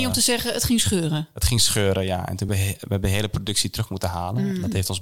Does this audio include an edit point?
no; 0 cuts

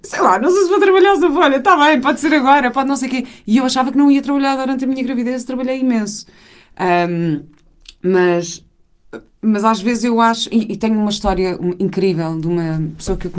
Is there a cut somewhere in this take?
no; 0 cuts

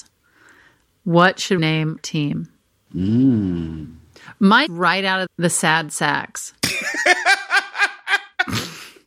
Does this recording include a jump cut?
yes; 4 cuts; at 1.6 s, 2.0 s, 4.7 s, 5.3 s

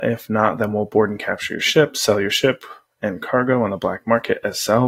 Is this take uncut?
yes; 0 cuts

